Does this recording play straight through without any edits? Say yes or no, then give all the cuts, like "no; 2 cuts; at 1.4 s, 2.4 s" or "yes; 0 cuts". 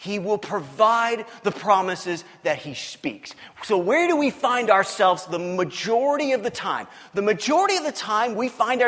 yes; 0 cuts